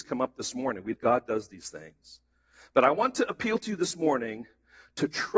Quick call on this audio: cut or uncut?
cut